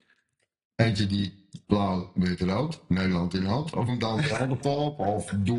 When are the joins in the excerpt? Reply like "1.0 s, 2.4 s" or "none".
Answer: 1.6 s, 3.9 s, 4.6 s